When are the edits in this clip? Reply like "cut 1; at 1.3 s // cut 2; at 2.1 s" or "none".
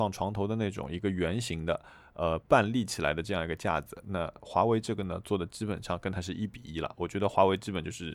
none